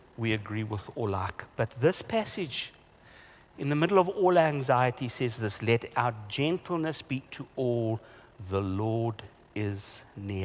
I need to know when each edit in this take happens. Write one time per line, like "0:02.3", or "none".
0:07.3